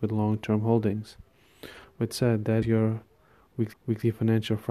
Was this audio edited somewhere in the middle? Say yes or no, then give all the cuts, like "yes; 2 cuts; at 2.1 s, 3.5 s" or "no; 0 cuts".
yes; 3 cuts; at 2.1 s, 2.6 s, 3.7 s